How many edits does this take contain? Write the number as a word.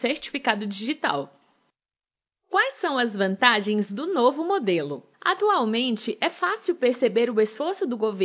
one